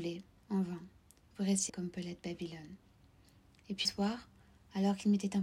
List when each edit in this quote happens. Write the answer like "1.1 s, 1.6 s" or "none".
1.7 s, 3.8 s